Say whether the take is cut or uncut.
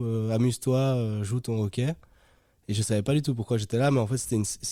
uncut